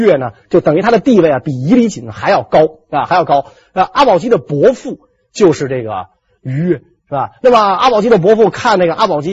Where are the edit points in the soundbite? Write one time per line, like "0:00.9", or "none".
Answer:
none